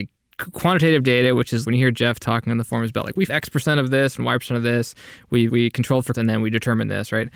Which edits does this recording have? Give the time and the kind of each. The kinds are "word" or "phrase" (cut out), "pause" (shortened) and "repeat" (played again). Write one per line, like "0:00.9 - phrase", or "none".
0:01.6 - word
0:03.3 - word
0:05.5 - word
0:06.1 - word